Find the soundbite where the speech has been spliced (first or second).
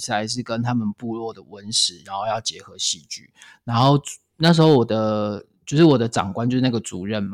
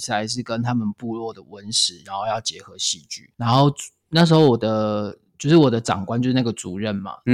second